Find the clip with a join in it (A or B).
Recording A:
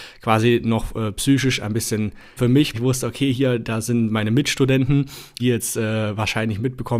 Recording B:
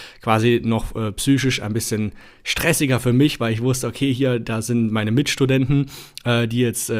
A